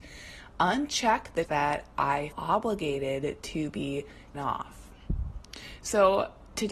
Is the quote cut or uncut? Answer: cut